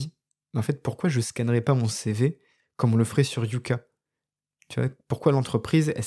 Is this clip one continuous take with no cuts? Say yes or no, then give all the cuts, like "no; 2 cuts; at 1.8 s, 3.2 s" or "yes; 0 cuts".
yes; 0 cuts